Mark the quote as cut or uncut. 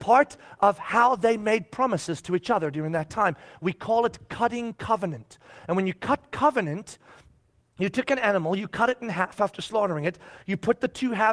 uncut